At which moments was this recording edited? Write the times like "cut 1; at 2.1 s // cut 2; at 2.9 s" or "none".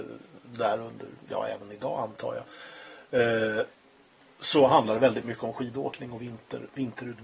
none